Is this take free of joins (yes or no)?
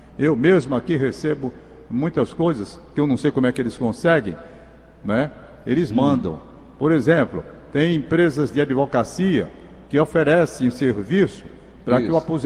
yes